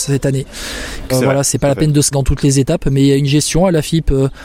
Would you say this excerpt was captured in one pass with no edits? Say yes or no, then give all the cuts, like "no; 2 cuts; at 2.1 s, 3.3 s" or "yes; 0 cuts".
no; 2 cuts; at 1.1 s, 2.1 s